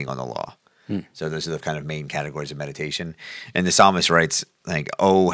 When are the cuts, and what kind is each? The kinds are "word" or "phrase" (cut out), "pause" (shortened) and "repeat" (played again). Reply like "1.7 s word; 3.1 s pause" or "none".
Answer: 1.6 s word